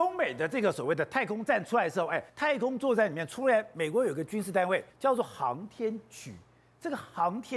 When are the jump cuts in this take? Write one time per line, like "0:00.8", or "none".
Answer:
0:02.3
0:04.9